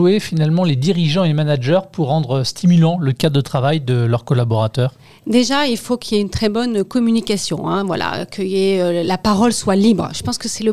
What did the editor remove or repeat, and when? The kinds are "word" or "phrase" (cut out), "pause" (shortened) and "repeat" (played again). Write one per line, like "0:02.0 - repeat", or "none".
none